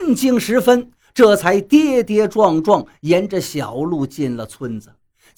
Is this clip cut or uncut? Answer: uncut